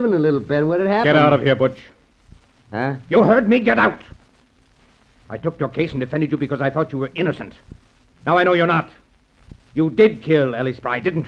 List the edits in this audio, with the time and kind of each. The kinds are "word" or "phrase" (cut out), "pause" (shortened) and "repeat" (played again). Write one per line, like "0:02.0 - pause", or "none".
none